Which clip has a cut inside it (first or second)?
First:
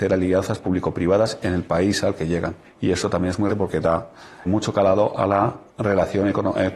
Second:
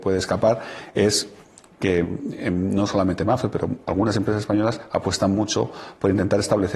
first